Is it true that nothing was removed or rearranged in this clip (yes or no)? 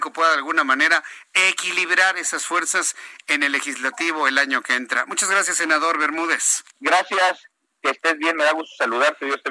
no